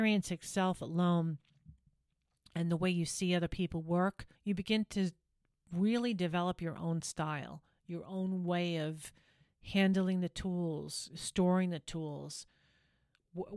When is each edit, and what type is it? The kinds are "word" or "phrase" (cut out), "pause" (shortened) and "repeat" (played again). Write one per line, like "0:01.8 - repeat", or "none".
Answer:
0:04.4 - pause